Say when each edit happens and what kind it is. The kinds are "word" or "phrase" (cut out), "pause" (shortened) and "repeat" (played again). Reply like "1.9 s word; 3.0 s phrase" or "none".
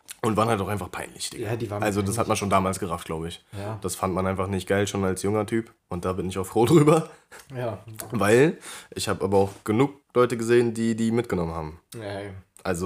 5.8 s pause; 10.0 s pause